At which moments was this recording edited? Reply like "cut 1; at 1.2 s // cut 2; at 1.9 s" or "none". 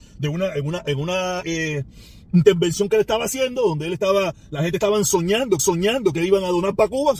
cut 1; at 1.4 s // cut 2; at 5.6 s